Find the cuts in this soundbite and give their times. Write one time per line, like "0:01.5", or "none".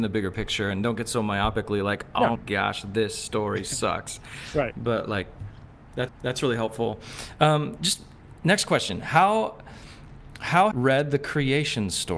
0:02.3
0:06.1
0:07.8
0:10.7